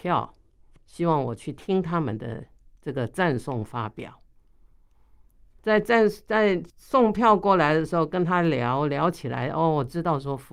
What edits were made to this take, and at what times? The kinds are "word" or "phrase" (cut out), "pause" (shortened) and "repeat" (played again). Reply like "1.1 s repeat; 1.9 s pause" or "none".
6.7 s pause